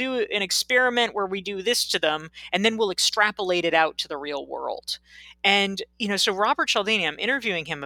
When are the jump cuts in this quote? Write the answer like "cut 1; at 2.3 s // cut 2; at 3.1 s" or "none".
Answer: cut 1; at 5.9 s